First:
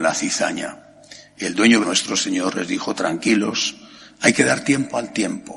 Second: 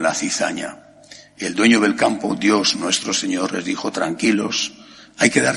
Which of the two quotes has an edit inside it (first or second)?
first